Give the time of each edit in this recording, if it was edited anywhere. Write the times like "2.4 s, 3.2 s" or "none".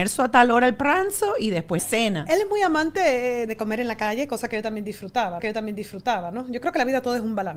1.8 s, 3.5 s, 5.4 s